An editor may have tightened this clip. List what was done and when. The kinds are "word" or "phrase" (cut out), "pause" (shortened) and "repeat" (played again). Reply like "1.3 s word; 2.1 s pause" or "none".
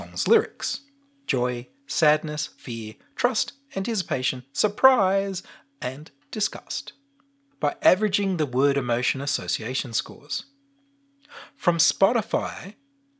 1.1 s word